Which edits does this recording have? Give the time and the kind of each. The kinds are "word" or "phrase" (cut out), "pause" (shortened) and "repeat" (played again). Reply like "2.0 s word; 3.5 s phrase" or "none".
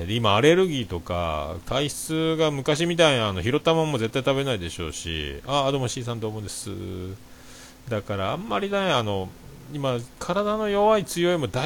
none